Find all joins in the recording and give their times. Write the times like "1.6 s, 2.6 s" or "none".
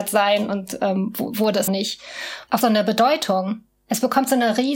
1.7 s, 2.6 s